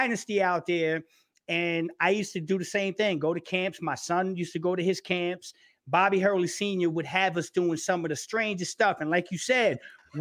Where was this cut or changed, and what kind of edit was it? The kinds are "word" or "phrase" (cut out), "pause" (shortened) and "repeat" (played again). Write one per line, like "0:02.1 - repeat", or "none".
none